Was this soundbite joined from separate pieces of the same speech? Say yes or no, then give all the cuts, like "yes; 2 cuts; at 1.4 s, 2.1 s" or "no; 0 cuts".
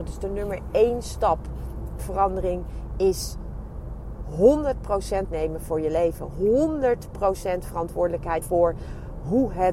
yes; 3 cuts; at 2.0 s, 5.3 s, 8.4 s